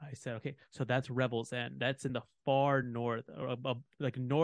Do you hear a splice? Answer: no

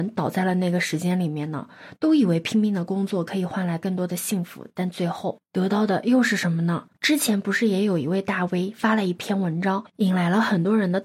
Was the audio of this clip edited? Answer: no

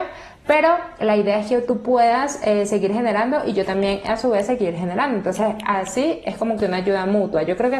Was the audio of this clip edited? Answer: no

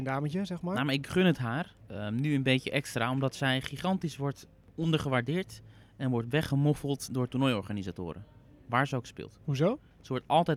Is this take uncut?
yes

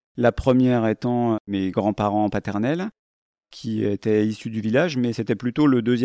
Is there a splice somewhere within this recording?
no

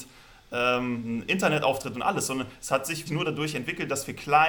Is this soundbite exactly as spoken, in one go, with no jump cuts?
no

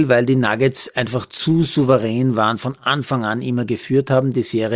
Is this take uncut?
yes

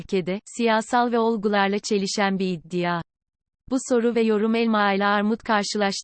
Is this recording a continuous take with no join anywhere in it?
yes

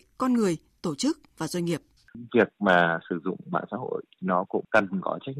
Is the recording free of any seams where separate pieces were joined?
no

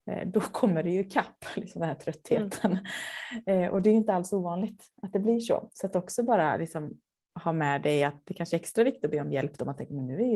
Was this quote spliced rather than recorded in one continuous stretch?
no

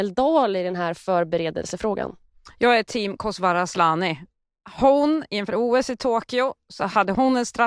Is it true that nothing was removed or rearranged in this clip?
yes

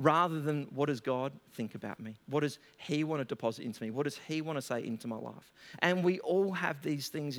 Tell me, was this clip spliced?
no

